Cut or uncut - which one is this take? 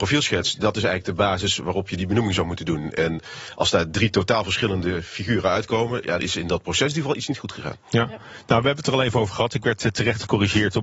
cut